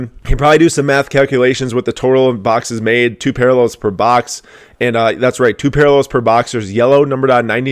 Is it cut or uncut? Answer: uncut